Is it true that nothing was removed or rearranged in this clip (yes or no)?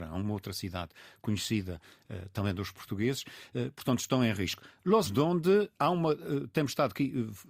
no